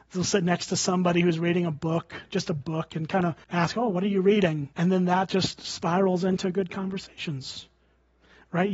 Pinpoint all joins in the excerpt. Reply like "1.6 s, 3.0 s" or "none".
3.4 s, 4.7 s